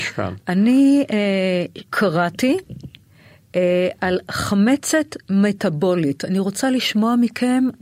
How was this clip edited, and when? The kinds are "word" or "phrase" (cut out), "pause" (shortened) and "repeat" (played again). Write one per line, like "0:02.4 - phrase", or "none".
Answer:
0:01.9 - pause